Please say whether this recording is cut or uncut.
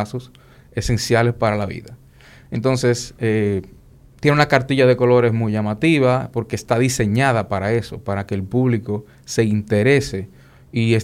uncut